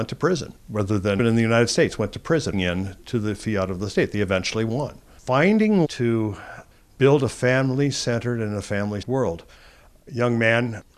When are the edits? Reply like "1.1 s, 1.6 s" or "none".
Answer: 1.2 s, 2.5 s, 5.8 s, 9.0 s